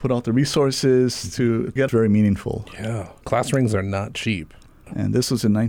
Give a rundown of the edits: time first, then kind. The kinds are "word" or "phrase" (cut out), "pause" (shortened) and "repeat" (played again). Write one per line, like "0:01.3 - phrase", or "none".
0:01.9 - phrase